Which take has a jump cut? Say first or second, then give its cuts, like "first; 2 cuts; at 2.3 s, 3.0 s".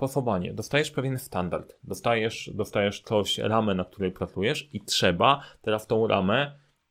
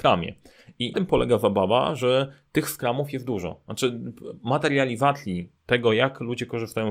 second; 2 cuts; at 0.9 s, 5.6 s